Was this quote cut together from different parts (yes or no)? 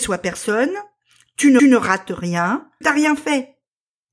yes